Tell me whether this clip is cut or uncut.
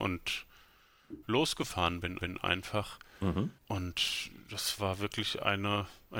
cut